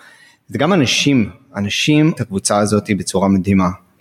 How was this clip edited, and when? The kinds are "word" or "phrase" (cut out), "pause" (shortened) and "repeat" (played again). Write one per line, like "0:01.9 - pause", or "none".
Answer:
0:02.2 - phrase